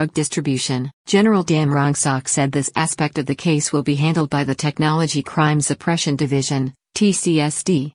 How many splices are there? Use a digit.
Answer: 1